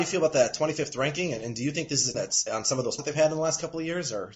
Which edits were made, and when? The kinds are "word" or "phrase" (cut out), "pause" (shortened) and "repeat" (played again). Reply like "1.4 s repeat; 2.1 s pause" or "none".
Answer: 2.1 s word; 2.5 s word; 3.0 s word

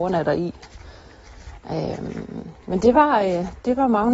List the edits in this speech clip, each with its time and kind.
none

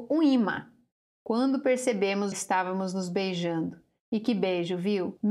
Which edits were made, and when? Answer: 2.3 s word

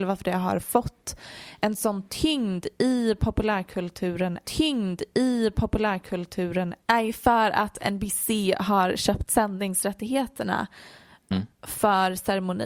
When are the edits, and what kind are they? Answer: 4.4 s repeat; 11.3 s word

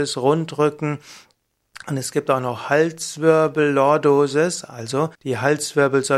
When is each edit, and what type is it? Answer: 5.1 s pause

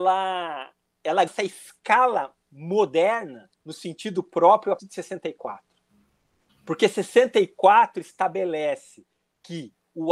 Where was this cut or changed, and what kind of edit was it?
1.3 s word; 3.5 s pause; 4.8 s word

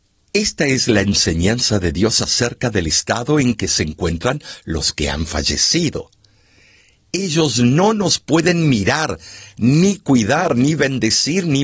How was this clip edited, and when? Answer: none

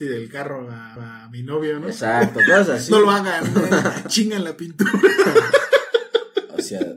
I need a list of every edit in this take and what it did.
1.0 s repeat

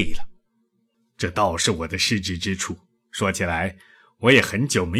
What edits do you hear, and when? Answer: none

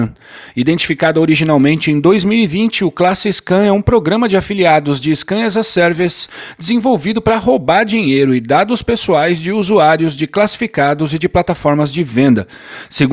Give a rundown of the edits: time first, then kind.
none

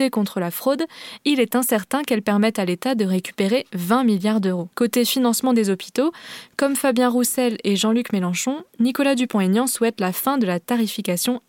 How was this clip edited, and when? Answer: 4.7 s pause

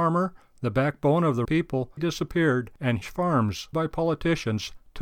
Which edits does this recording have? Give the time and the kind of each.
1.4 s word; 2.0 s word; 3.0 s word; 3.7 s word

